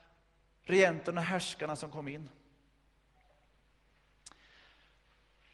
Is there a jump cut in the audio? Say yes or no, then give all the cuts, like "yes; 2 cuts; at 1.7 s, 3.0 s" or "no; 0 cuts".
no; 0 cuts